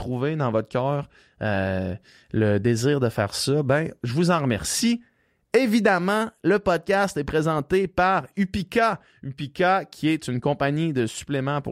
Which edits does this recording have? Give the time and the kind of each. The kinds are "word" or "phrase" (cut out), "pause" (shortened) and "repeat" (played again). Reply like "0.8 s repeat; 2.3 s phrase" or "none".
none